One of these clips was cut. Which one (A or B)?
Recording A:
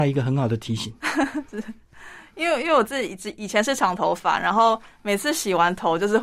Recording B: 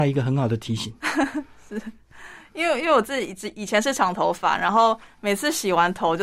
A